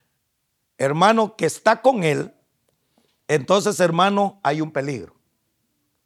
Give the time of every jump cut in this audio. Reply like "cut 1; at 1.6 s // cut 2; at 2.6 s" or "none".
none

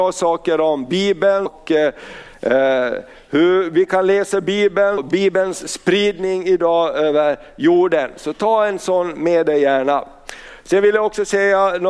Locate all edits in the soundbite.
cut 1; at 1.5 s // cut 2; at 5.0 s

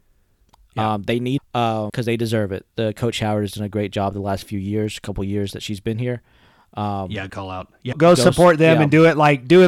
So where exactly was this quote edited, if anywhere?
cut 1; at 1.4 s // cut 2; at 1.9 s // cut 3; at 7.3 s // cut 4; at 7.9 s

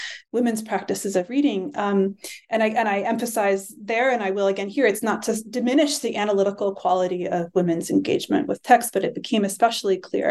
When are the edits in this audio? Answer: none

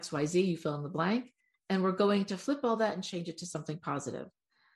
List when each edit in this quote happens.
cut 1; at 1.4 s

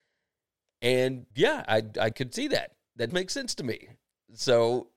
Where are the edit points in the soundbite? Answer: cut 1; at 1.3 s // cut 2; at 2.1 s // cut 3; at 3.1 s

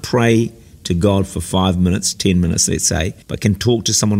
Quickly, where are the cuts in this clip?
cut 1; at 3.2 s

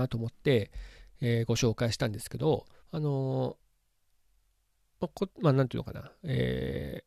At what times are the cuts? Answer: cut 1; at 2.8 s

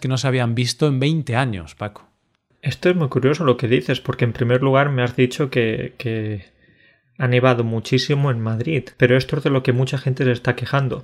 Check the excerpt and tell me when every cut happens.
cut 1; at 8.9 s

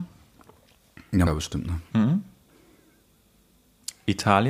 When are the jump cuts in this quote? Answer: cut 1; at 1.3 s

